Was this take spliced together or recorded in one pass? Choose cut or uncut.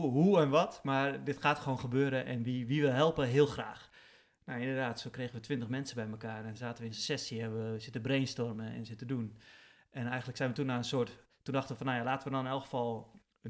uncut